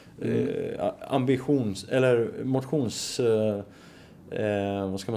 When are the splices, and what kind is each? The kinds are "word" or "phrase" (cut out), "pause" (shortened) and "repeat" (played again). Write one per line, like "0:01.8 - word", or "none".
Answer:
none